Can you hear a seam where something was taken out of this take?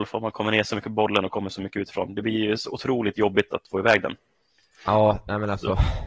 no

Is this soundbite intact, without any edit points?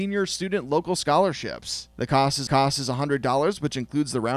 no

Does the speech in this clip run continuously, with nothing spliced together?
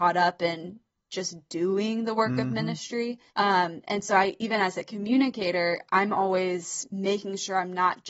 no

